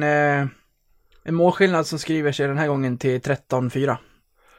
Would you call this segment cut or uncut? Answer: uncut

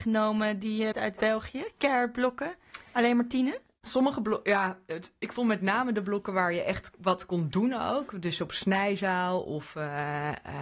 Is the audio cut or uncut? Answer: cut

